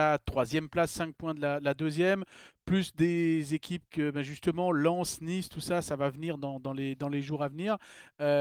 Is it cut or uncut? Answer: uncut